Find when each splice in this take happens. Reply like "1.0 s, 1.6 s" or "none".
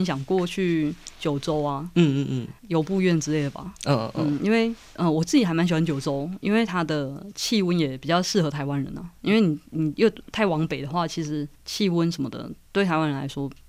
2.6 s, 11.5 s